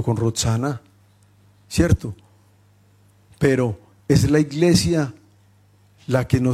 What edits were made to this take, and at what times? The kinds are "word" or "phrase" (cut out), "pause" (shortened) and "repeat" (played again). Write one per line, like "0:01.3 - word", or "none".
none